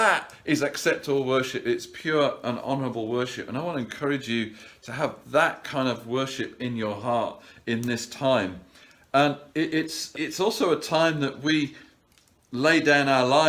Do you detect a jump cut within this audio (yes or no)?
yes